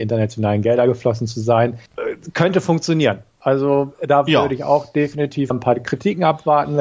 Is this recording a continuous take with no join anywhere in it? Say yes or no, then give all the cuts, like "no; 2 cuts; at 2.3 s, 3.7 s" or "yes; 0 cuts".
no; 2 cuts; at 1.9 s, 5.5 s